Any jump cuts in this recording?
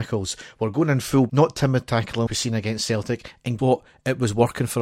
yes; 3 cuts; at 1.3 s, 2.3 s, 3.6 s

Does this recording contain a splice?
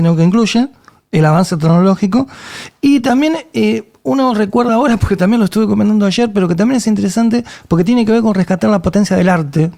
no; 0 cuts

